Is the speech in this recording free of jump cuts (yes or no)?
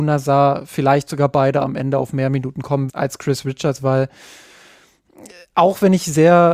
no